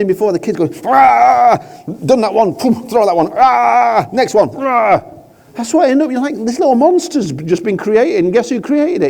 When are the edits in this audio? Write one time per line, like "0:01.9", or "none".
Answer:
none